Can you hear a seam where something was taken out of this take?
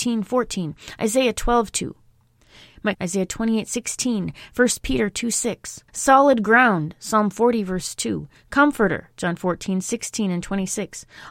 yes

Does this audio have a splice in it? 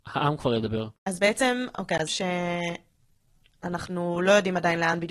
yes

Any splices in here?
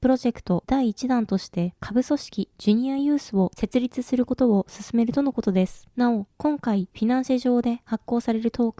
yes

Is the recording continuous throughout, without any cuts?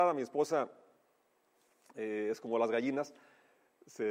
yes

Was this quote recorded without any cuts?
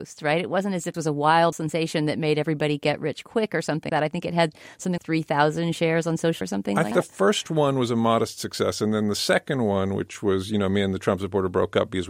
no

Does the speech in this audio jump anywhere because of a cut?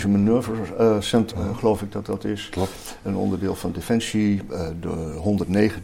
yes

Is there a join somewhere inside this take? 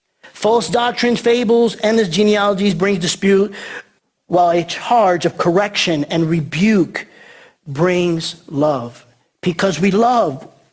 no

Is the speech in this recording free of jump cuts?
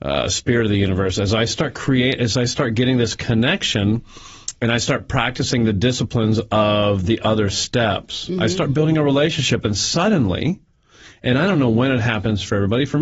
yes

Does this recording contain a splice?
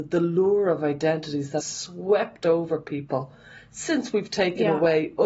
yes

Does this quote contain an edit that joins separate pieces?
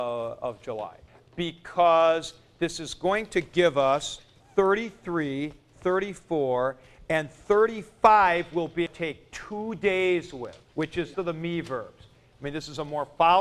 yes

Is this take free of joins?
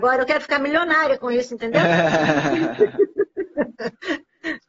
yes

